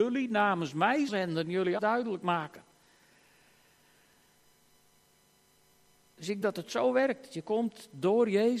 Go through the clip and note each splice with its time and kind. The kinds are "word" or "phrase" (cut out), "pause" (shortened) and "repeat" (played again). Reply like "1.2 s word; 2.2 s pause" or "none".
1.1 s word; 1.8 s word; 6.4 s word